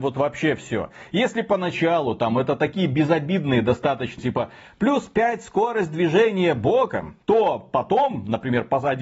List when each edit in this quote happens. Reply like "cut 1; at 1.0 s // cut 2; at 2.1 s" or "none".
cut 1; at 4.2 s // cut 2; at 7.2 s